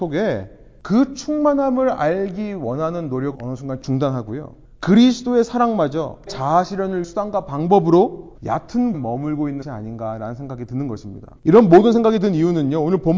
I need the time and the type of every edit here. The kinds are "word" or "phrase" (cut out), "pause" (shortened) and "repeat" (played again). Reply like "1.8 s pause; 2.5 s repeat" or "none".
3.3 s word; 4.6 s pause; 6.3 s word; 7.0 s word; 8.3 s word; 8.9 s word; 9.6 s word; 11.4 s pause